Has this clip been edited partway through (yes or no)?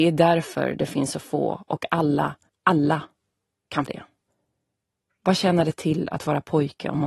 yes